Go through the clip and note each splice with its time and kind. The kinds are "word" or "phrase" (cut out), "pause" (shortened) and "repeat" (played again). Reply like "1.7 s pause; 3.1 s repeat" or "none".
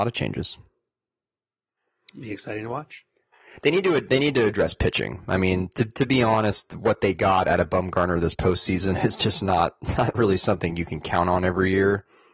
none